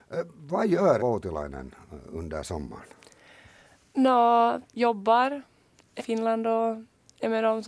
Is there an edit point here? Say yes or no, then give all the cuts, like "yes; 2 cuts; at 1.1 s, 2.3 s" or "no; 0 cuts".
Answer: yes; 3 cuts; at 1.0 s, 4.6 s, 6.0 s